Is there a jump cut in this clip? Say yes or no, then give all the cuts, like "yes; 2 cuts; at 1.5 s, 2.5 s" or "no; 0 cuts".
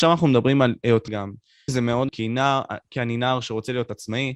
yes; 3 cuts; at 1.1 s, 1.7 s, 2.1 s